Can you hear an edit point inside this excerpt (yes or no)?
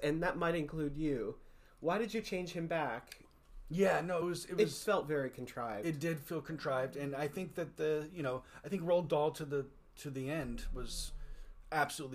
no